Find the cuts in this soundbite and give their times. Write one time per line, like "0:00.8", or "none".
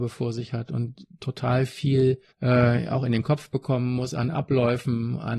0:02.3